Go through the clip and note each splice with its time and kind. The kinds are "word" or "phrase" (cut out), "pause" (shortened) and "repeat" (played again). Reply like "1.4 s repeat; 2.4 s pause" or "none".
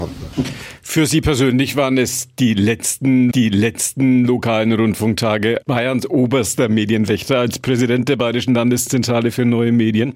3.3 s repeat; 5.6 s word